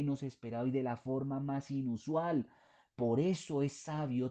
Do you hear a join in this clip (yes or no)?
no